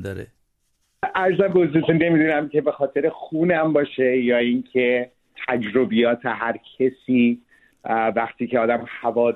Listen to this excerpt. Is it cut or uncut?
uncut